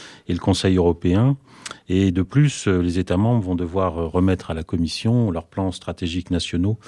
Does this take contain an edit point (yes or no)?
no